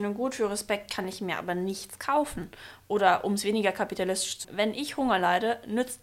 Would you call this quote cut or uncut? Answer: cut